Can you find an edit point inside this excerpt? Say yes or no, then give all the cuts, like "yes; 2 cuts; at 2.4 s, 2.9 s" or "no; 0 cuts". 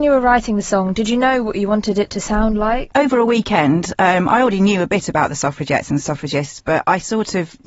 no; 0 cuts